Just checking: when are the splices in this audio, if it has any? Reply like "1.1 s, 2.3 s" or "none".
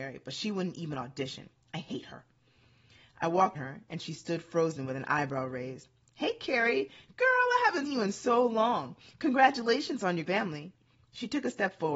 3.5 s, 7.9 s, 10.2 s